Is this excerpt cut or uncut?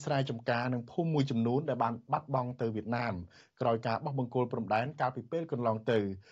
uncut